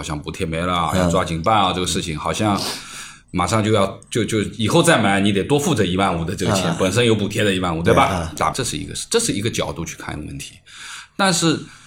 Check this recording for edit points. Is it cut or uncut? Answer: cut